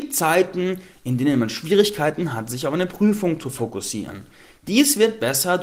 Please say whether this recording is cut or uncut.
uncut